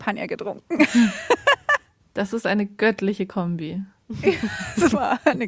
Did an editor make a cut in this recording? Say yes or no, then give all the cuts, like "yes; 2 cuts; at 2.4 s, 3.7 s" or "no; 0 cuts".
no; 0 cuts